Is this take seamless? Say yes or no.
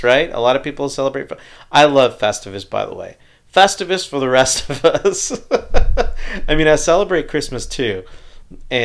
yes